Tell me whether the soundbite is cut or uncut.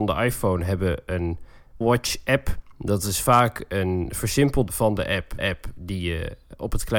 cut